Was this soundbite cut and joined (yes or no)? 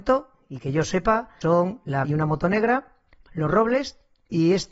yes